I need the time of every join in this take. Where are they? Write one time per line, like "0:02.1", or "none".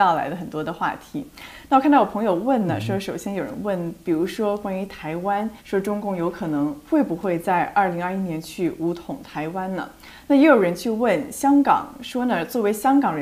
0:05.6